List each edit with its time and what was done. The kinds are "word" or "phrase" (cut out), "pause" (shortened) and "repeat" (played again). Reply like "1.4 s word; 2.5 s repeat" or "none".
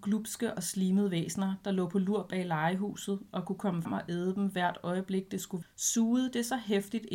3.8 s word; 5.6 s word